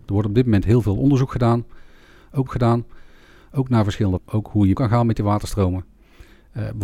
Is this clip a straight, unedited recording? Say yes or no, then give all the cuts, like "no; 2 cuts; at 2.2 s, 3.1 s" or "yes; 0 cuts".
no; 3 cuts; at 2.5 s, 4.2 s, 4.7 s